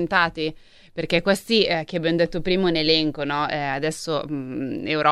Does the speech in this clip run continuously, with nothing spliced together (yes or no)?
yes